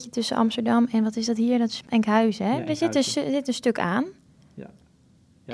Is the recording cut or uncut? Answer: uncut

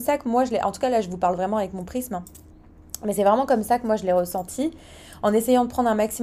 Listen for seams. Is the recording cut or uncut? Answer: uncut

